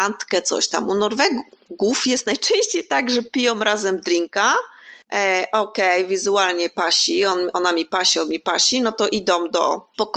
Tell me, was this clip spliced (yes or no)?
yes